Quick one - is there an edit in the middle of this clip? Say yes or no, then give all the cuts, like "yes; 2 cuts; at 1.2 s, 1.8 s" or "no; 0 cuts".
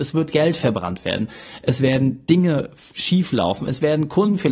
no; 0 cuts